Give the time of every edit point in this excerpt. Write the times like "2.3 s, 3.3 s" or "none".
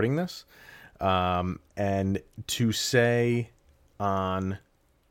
none